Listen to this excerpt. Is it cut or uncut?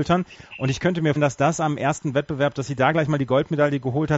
cut